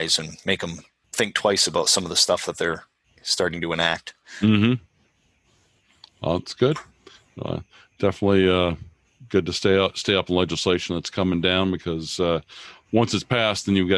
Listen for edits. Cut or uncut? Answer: uncut